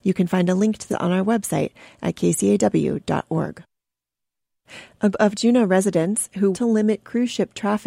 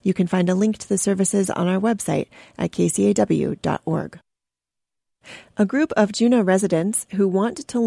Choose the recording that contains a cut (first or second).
first